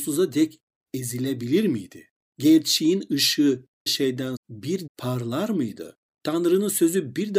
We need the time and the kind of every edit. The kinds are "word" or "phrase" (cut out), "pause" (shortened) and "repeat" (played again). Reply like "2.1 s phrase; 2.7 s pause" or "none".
3.9 s word; 4.4 s word; 4.9 s word